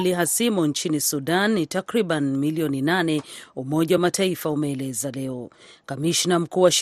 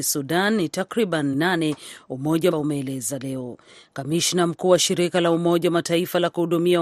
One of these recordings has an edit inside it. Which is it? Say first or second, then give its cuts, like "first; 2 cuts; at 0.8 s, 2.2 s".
second; 2 cuts; at 1.3 s, 2.5 s